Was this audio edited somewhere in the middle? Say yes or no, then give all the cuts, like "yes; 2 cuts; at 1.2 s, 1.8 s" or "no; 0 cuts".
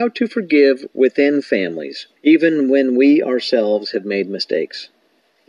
yes; 1 cut; at 2.2 s